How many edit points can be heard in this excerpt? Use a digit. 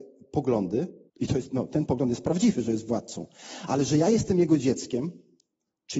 1